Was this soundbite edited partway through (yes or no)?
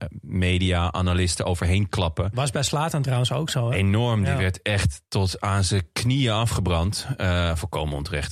no